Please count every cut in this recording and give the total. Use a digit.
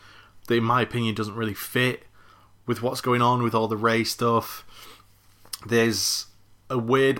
0